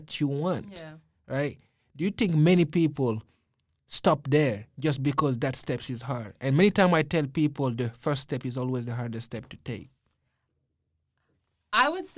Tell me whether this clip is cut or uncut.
uncut